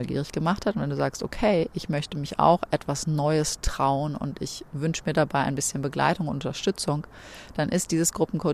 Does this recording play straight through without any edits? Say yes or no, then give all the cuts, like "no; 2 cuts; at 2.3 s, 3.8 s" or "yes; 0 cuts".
yes; 0 cuts